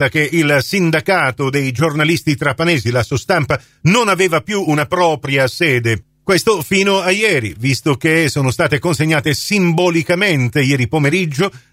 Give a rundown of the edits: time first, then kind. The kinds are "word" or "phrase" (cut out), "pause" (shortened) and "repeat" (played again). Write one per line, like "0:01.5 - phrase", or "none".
none